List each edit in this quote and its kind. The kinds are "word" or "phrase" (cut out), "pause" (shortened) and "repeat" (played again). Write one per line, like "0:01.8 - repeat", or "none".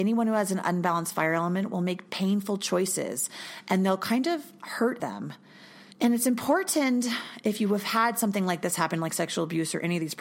0:05.0 - phrase
0:05.9 - pause